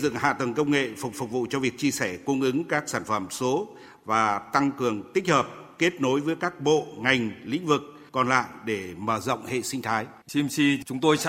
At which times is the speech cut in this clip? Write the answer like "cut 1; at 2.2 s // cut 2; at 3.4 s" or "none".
cut 1; at 1.1 s // cut 2; at 8.1 s // cut 3; at 10.2 s